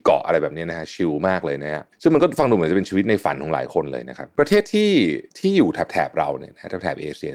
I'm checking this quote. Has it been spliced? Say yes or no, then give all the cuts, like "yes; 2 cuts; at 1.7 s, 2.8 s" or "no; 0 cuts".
yes; 2 cuts; at 1.9 s, 5.3 s